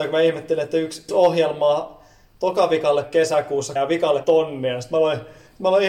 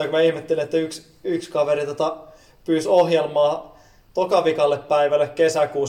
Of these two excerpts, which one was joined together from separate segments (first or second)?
first